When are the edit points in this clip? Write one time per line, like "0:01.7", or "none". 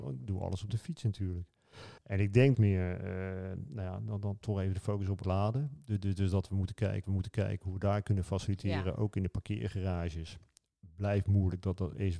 0:02.0
0:02.5
0:05.2
0:07.0